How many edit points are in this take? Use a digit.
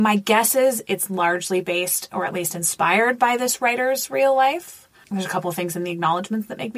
0